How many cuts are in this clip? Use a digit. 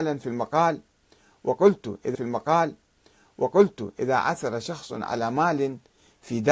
1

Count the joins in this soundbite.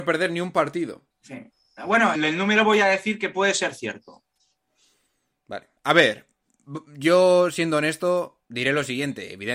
3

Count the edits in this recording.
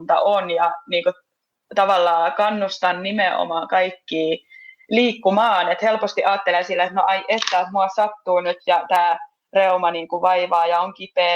0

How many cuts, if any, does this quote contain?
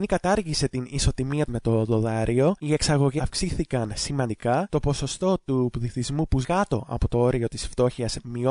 3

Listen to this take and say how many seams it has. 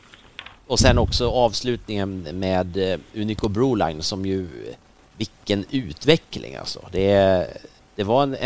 0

